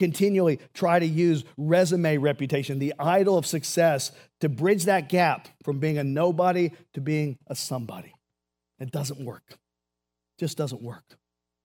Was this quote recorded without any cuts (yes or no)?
yes